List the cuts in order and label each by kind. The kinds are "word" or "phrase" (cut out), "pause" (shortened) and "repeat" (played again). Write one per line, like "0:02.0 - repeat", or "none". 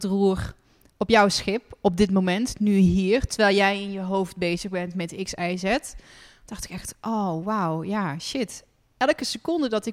none